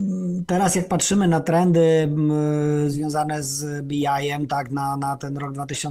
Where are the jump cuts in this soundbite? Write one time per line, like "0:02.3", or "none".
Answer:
none